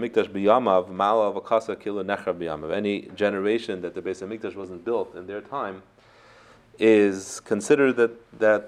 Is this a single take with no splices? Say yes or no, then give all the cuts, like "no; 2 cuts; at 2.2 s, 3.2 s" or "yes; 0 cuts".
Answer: yes; 0 cuts